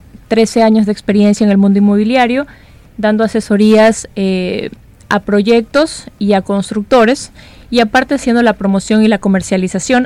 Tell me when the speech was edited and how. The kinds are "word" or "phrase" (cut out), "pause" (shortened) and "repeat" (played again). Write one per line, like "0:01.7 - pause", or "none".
none